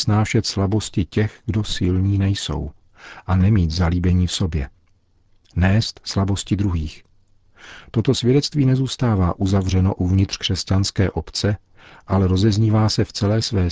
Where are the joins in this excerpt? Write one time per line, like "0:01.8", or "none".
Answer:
none